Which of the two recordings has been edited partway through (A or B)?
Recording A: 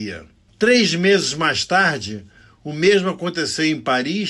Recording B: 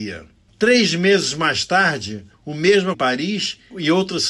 B